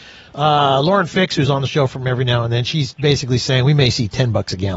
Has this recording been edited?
no; 0 cuts

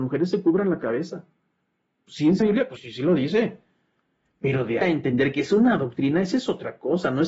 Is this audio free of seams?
no; 3 cuts; at 2.4 s, 2.8 s, 4.8 s

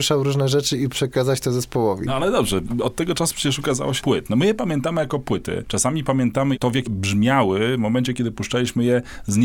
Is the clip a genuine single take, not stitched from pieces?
no; 3 cuts; at 0.9 s, 4.0 s, 6.9 s

